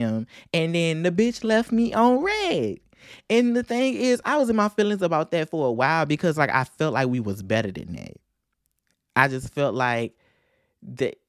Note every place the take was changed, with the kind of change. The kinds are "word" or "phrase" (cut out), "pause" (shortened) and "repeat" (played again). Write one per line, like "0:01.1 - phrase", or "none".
none